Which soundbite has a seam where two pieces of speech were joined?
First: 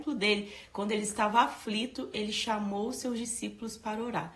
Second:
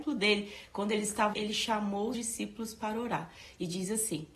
second; 2 cuts; at 1.3 s, 2.1 s

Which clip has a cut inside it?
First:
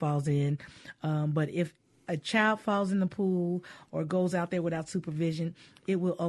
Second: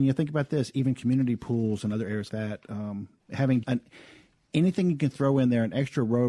second; 2 cuts; at 2.3 s, 3.6 s

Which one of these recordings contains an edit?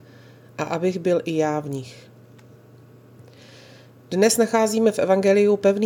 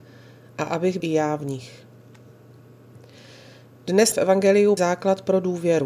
second; 3 cuts; at 1.0 s, 4.1 s, 4.8 s

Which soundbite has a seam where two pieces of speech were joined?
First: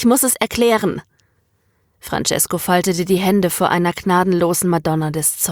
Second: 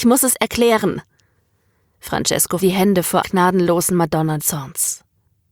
second; 3 cuts; at 2.6 s, 3.2 s, 4.4 s

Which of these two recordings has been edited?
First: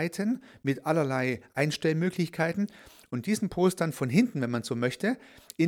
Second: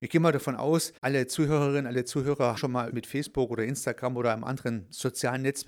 second; 3 cuts; at 1.0 s, 2.6 s, 2.9 s

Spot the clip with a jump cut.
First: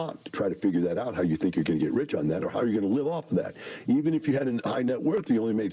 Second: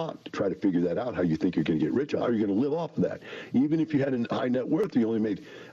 second; 1 cut; at 2.2 s

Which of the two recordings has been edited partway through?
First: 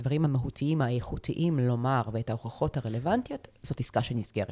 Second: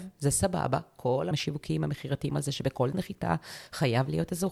second; 3 cuts; at 1.3 s, 2.3 s, 2.9 s

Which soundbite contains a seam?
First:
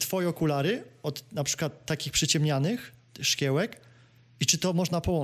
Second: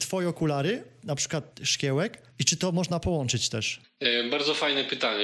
second; 3 cuts; at 1.0 s, 1.5 s, 2.3 s

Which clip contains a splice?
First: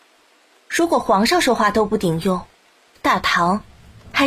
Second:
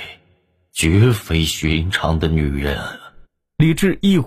second; 1 cut; at 3.2 s

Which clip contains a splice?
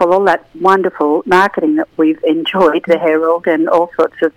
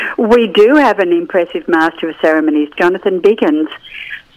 first; 2 cuts; at 1.2 s, 2.9 s

